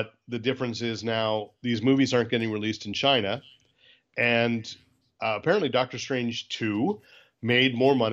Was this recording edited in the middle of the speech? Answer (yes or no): no